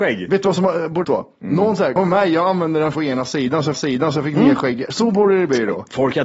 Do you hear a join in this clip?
yes; 4 cuts; at 1.0 s, 2.0 s, 2.9 s, 3.7 s

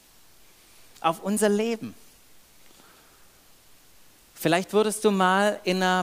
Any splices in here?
no; 0 cuts

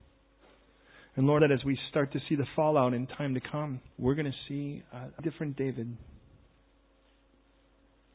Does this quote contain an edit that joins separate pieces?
yes; 3 cuts; at 1.4 s, 3.9 s, 5.2 s

